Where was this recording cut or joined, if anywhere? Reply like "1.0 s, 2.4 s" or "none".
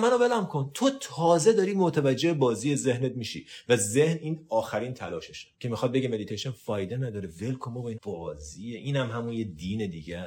5.5 s, 7.9 s